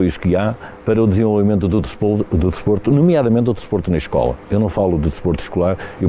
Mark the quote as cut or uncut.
uncut